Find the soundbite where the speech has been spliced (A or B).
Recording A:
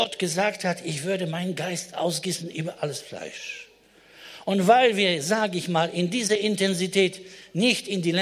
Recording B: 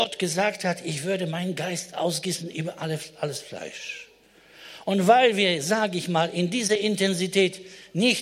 A